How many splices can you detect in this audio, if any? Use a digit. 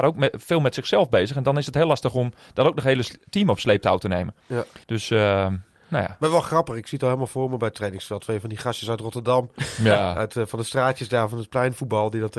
1